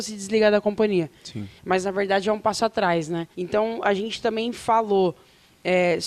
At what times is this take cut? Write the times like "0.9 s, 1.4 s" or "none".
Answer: 1.6 s, 3.3 s